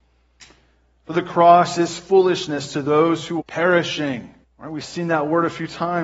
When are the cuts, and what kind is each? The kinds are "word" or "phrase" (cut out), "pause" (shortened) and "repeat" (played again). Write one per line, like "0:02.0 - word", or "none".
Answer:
0:01.1 - phrase
0:03.4 - word
0:04.4 - pause